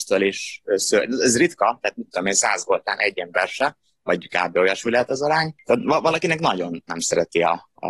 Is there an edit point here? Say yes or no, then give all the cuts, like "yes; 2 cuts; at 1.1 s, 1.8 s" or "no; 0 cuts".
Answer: no; 0 cuts